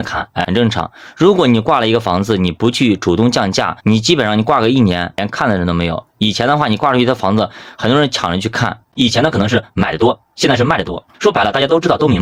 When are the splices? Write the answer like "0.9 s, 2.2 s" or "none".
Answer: 3.8 s, 11.1 s